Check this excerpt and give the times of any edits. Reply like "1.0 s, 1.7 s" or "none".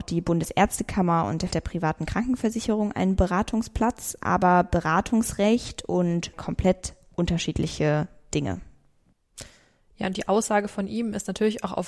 1.5 s, 6.3 s